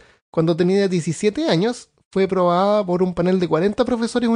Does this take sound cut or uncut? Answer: uncut